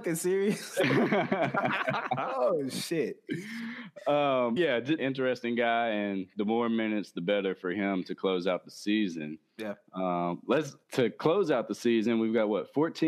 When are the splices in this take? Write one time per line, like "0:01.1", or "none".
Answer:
0:04.6
0:05.0
0:10.8

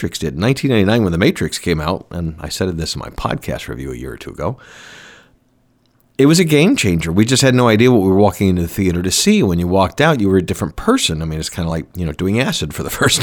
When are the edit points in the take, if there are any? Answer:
none

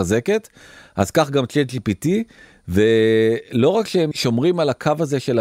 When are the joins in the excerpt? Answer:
0:04.1

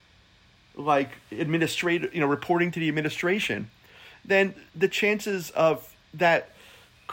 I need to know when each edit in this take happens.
0:01.2
0:04.7
0:06.0

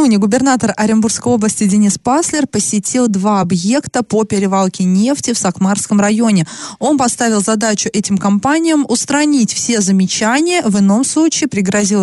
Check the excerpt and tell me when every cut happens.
none

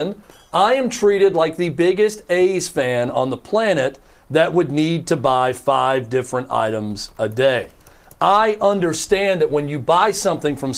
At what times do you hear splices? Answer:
none

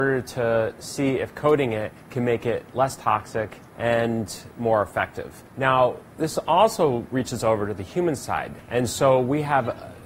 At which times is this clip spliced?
0:02.0
0:03.7

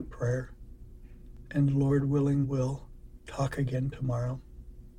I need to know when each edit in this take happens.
0:02.4
0:03.2

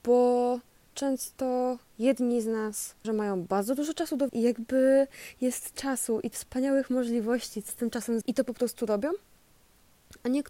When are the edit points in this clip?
0:00.9
0:03.0
0:04.3
0:05.7
0:06.3
0:07.7
0:08.2

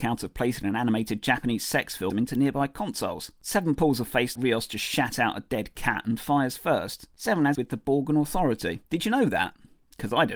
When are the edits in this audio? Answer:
0:02.1
0:04.4
0:07.6
0:08.8

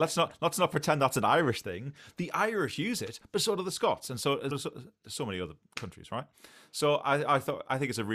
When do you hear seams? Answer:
0:04.5

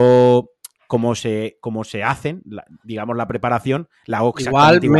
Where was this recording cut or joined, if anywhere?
none

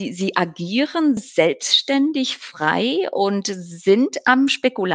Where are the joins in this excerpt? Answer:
0:01.2

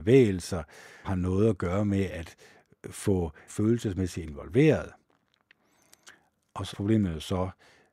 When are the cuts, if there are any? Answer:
0:01.0
0:03.5
0:06.7

